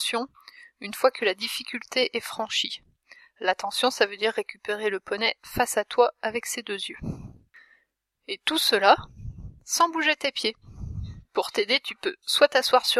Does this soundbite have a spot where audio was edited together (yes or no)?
no